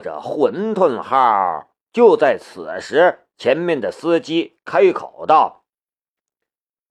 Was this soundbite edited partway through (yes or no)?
yes